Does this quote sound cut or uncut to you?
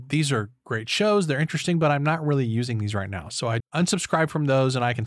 cut